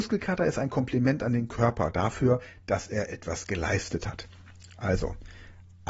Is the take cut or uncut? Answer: uncut